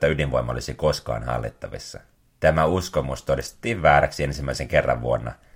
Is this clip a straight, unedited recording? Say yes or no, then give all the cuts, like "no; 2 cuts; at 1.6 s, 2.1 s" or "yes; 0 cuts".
no; 1 cut; at 2.1 s